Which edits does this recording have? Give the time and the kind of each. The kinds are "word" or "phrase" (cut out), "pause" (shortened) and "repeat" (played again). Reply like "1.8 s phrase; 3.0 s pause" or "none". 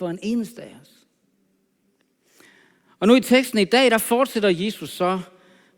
none